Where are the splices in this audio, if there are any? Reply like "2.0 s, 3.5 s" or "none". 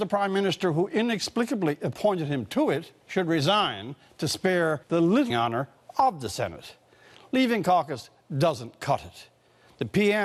3.0 s, 4.8 s, 5.3 s